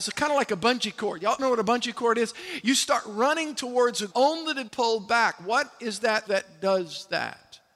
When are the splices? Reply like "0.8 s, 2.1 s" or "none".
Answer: 1.4 s, 4.1 s, 4.7 s, 6.3 s